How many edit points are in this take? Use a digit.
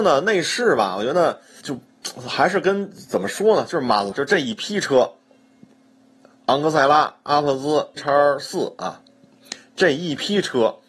3